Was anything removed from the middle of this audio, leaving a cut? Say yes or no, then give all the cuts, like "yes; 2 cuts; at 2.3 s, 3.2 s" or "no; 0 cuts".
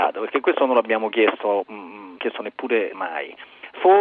yes; 2 cuts; at 2.2 s, 2.9 s